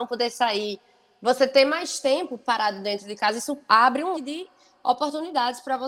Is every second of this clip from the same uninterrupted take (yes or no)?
no